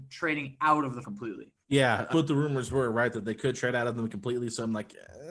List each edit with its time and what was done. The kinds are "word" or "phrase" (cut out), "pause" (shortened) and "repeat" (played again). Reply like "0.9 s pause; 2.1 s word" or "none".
1.0 s phrase; 1.6 s pause; 2.1 s phrase